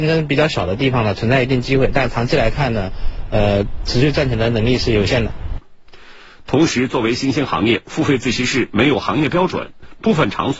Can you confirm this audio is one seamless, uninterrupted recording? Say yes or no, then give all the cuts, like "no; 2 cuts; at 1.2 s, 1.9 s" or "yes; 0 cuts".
yes; 0 cuts